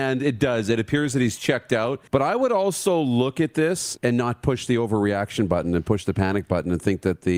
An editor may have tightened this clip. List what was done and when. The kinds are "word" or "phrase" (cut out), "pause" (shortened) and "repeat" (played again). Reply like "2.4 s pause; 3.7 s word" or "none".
2.1 s pause; 4.0 s word